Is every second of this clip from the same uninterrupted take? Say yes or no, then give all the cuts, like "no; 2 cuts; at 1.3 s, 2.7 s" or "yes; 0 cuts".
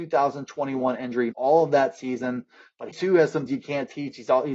no; 3 cuts; at 1.3 s, 2.9 s, 3.5 s